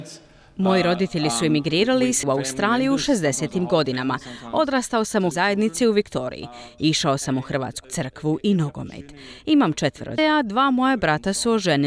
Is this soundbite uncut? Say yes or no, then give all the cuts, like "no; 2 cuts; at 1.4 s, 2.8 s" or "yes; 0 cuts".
no; 4 cuts; at 2.2 s, 5.3 s, 7.8 s, 10.2 s